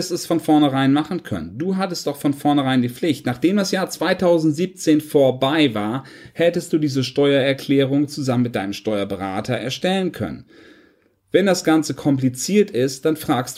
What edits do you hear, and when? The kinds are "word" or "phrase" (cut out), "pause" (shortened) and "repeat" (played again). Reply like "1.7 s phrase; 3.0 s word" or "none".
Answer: none